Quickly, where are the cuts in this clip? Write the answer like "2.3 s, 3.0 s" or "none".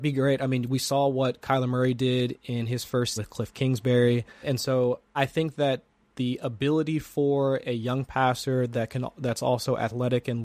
3.2 s, 4.4 s, 5.1 s